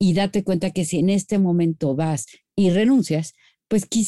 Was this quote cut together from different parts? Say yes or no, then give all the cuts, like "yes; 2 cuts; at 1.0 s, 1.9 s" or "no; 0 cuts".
no; 0 cuts